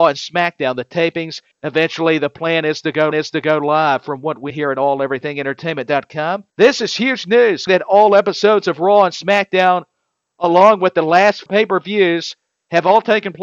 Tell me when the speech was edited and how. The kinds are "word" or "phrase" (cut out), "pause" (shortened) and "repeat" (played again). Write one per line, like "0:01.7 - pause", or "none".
0:01.5 - pause
0:03.1 - repeat
0:04.5 - word
0:06.5 - pause
0:07.7 - word
0:11.5 - word